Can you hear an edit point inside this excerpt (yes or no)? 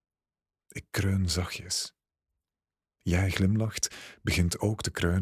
no